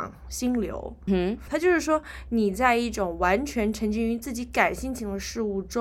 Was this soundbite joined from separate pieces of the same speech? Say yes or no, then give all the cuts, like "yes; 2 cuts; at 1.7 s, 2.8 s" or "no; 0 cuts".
yes; 2 cuts; at 1.1 s, 1.5 s